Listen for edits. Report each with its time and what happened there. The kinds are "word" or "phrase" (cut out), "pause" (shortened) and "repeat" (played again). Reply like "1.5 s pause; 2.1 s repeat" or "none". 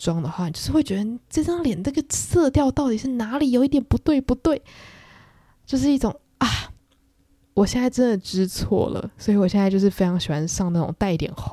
none